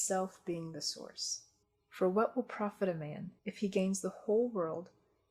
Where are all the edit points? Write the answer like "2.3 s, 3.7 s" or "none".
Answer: 1.6 s, 3.4 s